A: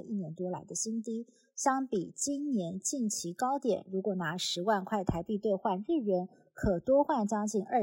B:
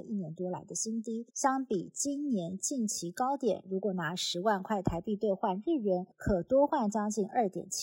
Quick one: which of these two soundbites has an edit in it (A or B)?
B